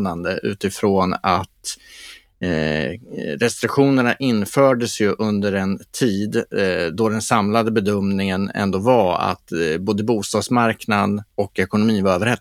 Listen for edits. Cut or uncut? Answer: uncut